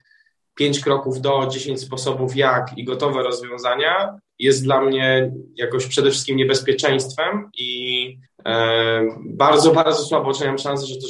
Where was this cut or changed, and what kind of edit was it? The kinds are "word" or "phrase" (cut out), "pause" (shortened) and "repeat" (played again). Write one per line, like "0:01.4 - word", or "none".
0:08.3 - pause